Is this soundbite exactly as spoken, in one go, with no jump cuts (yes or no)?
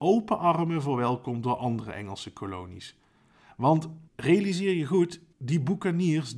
no